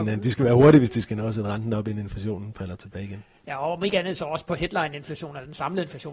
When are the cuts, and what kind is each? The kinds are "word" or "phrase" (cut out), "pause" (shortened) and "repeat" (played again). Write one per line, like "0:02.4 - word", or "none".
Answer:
none